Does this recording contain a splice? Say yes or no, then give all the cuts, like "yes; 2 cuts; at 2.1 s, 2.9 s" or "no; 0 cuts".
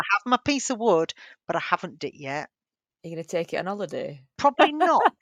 yes; 1 cut; at 2.0 s